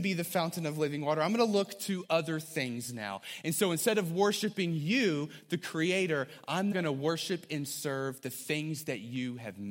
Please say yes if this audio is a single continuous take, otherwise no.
no